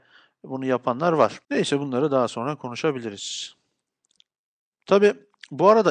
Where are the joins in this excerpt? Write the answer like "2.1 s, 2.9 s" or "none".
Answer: 1.4 s